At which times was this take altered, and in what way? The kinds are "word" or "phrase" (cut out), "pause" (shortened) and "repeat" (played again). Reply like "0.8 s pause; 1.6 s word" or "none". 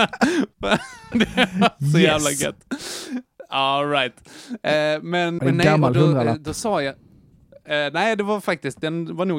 5.4 s word